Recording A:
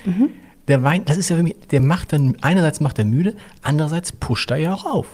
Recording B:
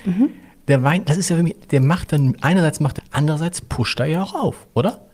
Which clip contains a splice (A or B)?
B